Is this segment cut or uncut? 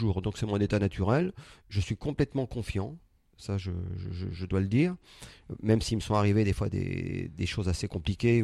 uncut